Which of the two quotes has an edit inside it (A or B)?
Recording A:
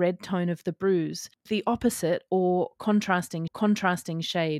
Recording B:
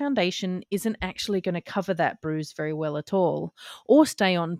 A